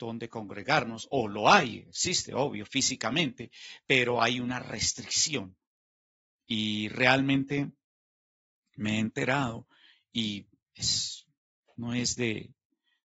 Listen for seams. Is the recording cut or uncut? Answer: uncut